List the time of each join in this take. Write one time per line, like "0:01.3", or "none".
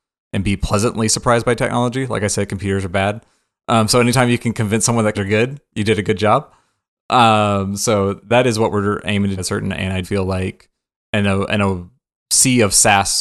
0:05.1
0:08.2
0:09.4
0:10.0